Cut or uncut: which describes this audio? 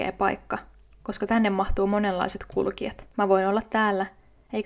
cut